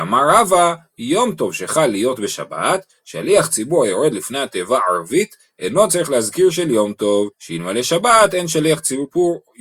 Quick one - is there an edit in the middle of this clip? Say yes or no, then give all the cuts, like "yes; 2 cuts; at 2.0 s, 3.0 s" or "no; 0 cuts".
yes; 1 cut; at 7.3 s